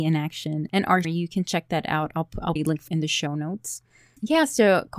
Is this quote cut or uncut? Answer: cut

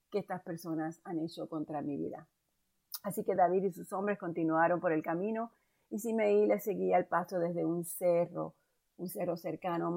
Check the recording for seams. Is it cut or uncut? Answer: uncut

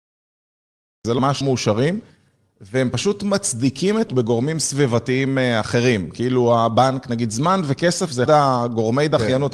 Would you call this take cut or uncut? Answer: cut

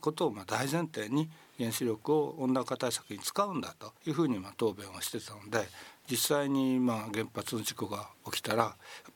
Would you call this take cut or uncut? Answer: cut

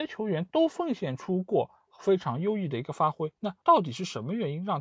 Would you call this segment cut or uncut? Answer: cut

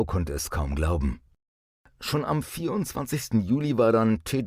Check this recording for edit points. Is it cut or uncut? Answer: uncut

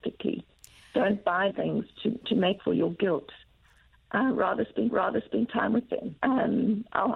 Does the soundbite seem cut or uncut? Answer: cut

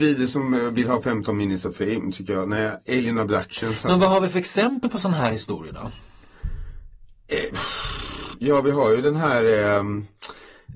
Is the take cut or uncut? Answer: uncut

